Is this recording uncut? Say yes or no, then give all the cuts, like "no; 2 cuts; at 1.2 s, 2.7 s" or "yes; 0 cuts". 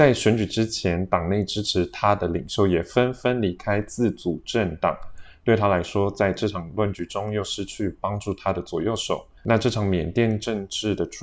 no; 1 cut; at 9.4 s